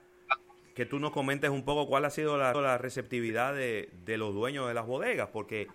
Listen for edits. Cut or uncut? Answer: cut